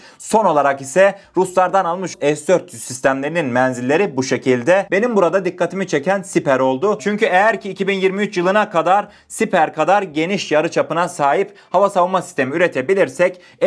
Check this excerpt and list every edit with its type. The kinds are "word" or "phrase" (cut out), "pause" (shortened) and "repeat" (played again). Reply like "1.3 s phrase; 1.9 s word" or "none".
2.1 s word